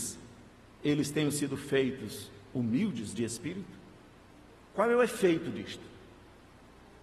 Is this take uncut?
yes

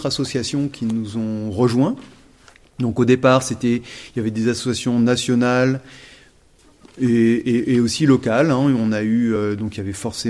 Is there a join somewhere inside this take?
no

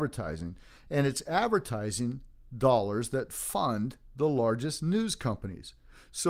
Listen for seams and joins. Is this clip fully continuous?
yes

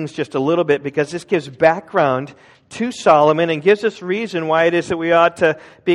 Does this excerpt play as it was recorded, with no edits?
yes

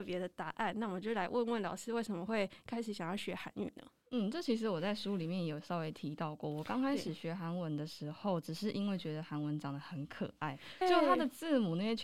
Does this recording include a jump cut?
yes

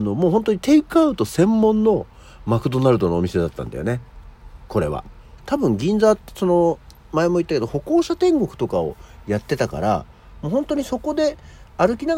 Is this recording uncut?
no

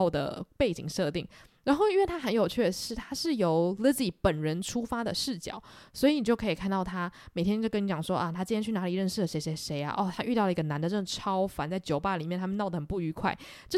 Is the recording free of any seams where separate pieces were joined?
yes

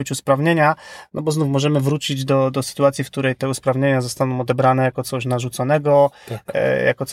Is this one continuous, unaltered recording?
yes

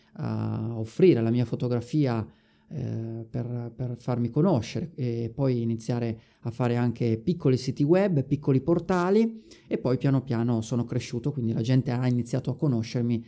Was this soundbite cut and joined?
no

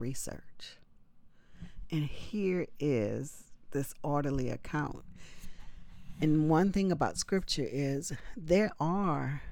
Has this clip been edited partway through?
no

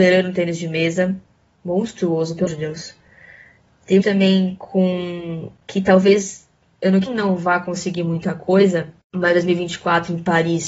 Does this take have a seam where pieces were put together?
yes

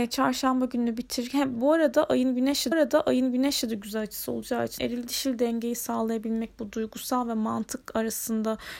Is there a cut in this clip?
yes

